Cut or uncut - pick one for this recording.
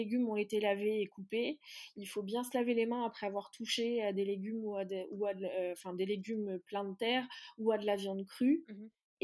uncut